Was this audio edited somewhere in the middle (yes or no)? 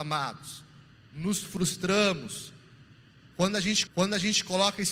yes